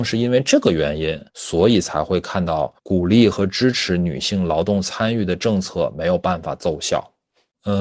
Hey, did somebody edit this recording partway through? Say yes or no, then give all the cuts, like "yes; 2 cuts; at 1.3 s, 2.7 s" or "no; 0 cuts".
yes; 2 cuts; at 1.3 s, 2.8 s